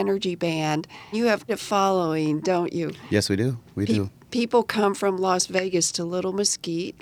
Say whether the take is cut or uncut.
cut